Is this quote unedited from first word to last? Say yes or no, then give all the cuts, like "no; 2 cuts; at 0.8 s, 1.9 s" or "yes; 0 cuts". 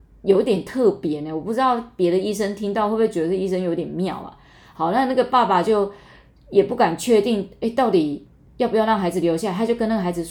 yes; 0 cuts